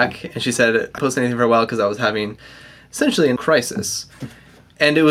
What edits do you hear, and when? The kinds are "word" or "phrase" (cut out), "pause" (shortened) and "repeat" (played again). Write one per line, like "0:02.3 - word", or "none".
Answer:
0:01.0 - word
0:03.4 - word